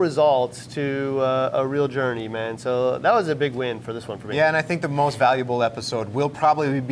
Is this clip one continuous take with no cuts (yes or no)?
yes